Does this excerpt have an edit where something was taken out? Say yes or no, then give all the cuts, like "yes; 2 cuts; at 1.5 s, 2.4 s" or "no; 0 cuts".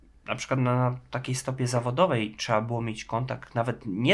no; 0 cuts